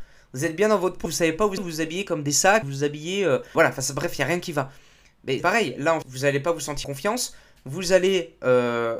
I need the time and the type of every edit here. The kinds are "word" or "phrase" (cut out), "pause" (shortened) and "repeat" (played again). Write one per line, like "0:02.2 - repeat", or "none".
0:01.1 - word
0:01.6 - word
0:02.6 - word
0:03.5 - word
0:05.4 - word
0:06.0 - word
0:06.8 - word